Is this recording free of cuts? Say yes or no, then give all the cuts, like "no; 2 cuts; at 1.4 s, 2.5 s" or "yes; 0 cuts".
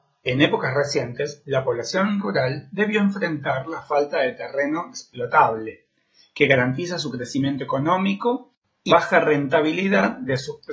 no; 1 cut; at 8.9 s